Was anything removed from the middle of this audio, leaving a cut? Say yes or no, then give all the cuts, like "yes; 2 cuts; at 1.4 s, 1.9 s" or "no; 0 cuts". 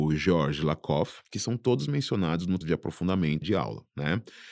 yes; 3 cuts; at 1.3 s, 2.6 s, 3.4 s